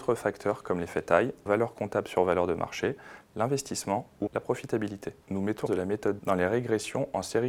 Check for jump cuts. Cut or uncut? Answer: cut